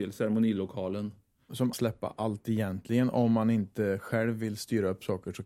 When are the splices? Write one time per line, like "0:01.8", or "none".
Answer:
0:01.7